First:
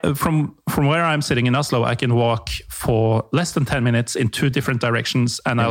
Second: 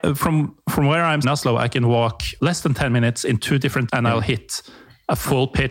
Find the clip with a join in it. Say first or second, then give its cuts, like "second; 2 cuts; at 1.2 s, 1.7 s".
second; 3 cuts; at 1.2 s, 2.4 s, 3.9 s